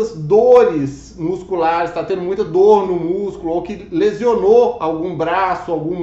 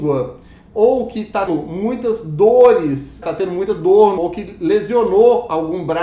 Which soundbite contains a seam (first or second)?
second